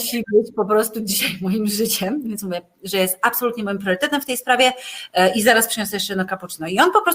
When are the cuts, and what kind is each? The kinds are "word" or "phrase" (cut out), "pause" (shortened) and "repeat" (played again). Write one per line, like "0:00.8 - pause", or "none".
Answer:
none